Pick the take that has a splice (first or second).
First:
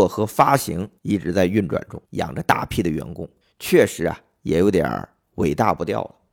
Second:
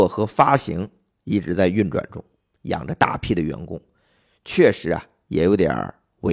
first